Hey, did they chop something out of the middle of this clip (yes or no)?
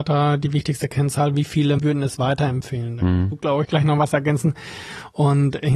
yes